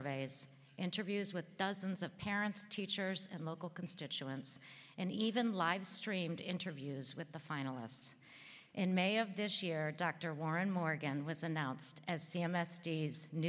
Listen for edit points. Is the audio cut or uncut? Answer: uncut